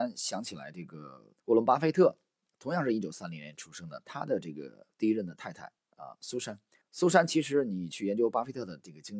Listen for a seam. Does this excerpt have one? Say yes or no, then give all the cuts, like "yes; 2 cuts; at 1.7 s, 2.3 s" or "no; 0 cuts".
yes; 2 cuts; at 1.4 s, 6.8 s